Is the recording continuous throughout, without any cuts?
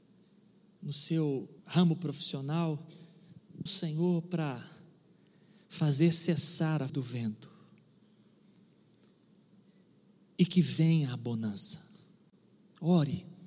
no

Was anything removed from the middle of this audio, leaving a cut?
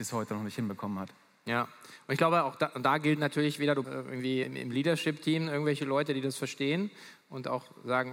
yes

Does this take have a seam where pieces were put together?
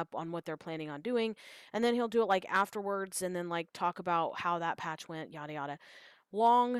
no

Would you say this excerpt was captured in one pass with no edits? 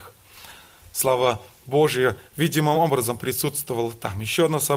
yes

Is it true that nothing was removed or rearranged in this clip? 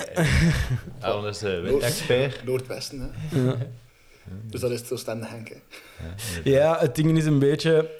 yes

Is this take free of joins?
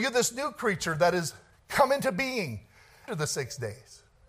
no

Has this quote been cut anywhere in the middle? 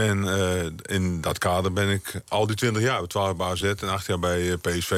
no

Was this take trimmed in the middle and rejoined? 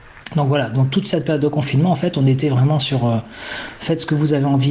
no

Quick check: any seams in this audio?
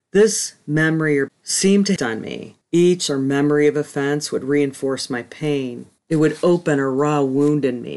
yes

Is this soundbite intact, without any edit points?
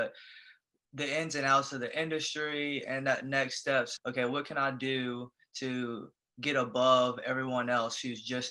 no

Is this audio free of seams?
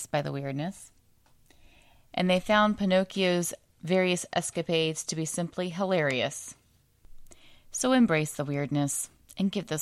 yes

